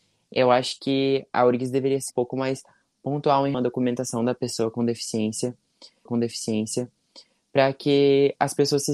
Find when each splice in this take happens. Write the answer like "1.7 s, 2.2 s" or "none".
2.1 s, 3.5 s, 6.1 s